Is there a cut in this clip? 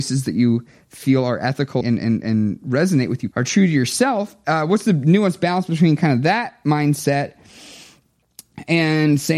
yes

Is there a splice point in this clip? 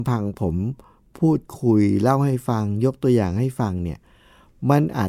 no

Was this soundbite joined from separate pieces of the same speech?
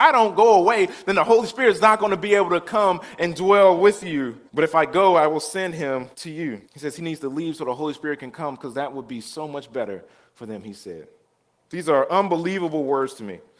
yes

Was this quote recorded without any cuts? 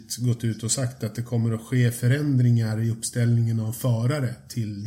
yes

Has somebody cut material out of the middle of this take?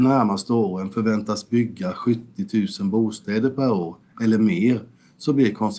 no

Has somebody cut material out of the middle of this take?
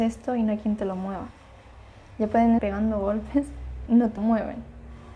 yes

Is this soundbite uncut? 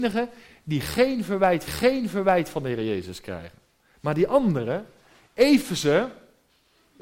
no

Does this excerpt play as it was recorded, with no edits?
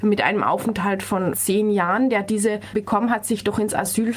no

